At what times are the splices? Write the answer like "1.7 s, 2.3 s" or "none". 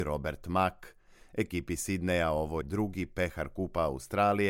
2.6 s